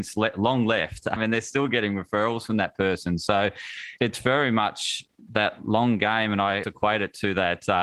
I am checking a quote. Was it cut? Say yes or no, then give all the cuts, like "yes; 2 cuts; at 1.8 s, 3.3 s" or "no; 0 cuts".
yes; 3 cuts; at 1.2 s, 4.0 s, 6.6 s